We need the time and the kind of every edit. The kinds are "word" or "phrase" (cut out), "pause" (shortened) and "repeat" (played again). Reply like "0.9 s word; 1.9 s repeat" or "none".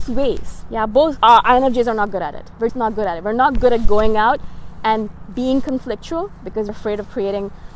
1.2 s word; 2.7 s word; 6.7 s word